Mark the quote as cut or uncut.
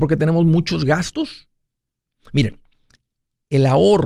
cut